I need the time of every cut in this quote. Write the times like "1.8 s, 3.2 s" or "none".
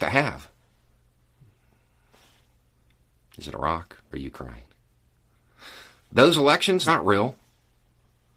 4.0 s, 6.9 s